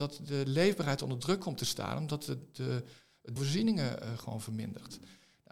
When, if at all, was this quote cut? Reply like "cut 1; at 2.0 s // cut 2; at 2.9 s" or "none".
cut 1; at 3.4 s

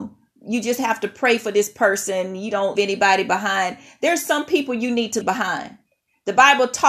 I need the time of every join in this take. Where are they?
cut 1; at 2.7 s // cut 2; at 5.2 s

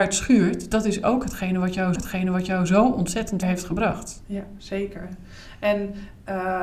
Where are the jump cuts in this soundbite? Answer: cut 1; at 2.0 s // cut 2; at 3.4 s

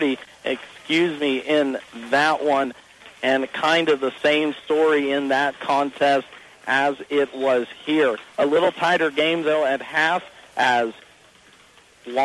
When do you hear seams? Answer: none

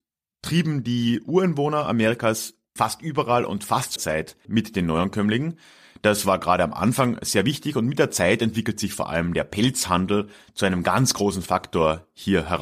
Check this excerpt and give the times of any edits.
cut 1; at 2.8 s // cut 2; at 4.0 s // cut 3; at 4.4 s

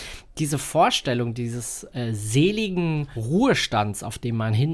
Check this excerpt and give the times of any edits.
none

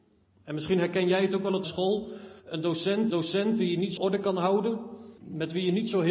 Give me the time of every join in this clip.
cut 1; at 1.6 s // cut 2; at 2.4 s // cut 3; at 3.1 s // cut 4; at 4.0 s // cut 5; at 5.2 s

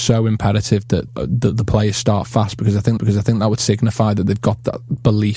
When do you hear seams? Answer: cut 1; at 1.1 s // cut 2; at 3.0 s

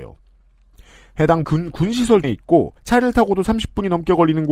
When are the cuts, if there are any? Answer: cut 1; at 1.4 s // cut 2; at 2.2 s // cut 3; at 2.8 s

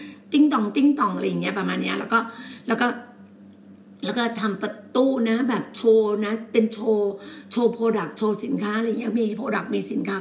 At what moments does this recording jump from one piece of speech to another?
cut 1; at 4.0 s

